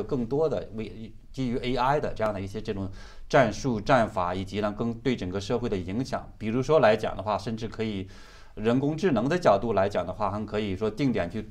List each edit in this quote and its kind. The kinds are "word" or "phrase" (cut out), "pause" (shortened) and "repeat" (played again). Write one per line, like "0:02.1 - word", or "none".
none

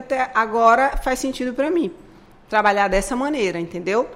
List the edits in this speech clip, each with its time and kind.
none

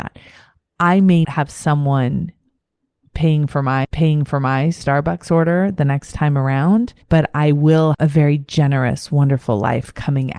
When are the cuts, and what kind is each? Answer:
0:01.2 - word
0:03.8 - repeat
0:07.0 - pause
0:07.9 - word

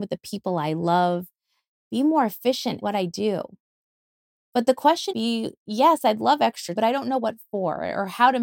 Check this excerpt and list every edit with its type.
0:02.8 - word
0:05.1 - word
0:06.8 - word

